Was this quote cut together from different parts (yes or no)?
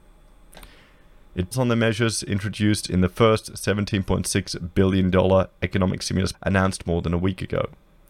yes